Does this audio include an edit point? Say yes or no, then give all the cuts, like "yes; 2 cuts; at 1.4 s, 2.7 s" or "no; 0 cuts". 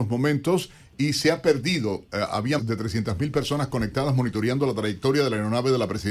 yes; 1 cut; at 2.6 s